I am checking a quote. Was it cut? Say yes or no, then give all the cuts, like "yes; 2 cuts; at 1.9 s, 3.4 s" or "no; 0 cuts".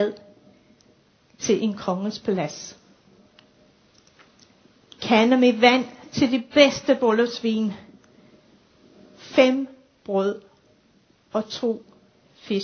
no; 0 cuts